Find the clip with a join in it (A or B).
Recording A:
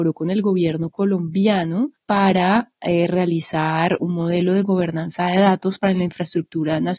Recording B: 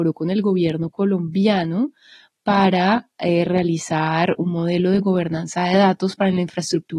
A